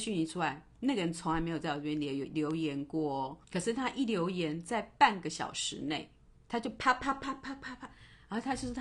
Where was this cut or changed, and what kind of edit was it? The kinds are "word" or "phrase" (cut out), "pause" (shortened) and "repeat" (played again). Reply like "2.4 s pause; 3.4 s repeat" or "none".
3.4 s pause; 6.3 s pause